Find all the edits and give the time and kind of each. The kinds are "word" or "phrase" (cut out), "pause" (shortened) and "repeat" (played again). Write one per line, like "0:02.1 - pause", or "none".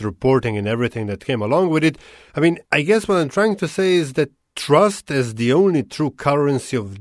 0:02.7 - pause